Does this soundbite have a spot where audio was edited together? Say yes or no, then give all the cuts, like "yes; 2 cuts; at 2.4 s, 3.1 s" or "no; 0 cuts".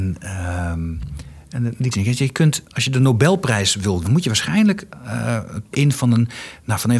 yes; 3 cuts; at 1.9 s, 4.0 s, 5.7 s